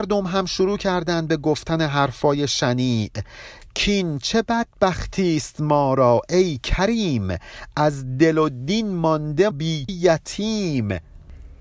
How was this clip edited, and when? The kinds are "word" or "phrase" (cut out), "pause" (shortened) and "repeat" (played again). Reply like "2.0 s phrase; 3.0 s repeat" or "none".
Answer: 9.5 s word; 9.9 s word